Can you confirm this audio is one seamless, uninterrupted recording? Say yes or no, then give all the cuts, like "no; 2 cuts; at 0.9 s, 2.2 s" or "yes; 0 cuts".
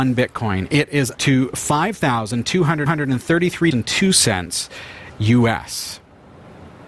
no; 3 cuts; at 1.1 s, 2.9 s, 3.7 s